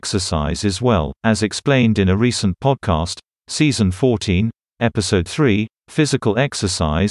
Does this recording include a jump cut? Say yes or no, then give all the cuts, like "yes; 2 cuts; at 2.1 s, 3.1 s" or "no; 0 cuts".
yes; 2 cuts; at 1.2 s, 5.8 s